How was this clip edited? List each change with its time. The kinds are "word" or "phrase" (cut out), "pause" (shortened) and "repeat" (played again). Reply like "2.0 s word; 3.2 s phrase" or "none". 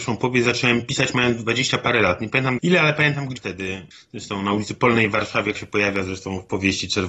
2.6 s word; 3.4 s word; 5.6 s word